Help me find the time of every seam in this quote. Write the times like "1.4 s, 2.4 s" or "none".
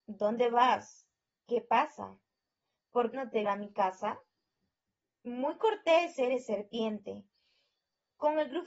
3.1 s, 3.5 s